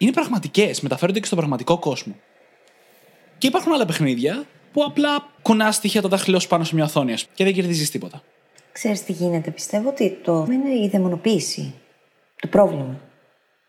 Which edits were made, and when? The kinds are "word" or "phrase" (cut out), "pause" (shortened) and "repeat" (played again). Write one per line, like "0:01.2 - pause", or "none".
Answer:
0:04.6 - pause
0:05.4 - pause
0:07.3 - word
0:10.5 - word